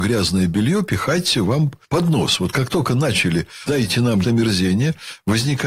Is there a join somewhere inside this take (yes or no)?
yes